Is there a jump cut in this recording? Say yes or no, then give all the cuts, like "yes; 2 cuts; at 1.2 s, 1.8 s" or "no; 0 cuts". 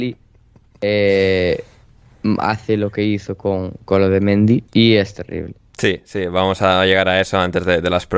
yes; 1 cut; at 4.7 s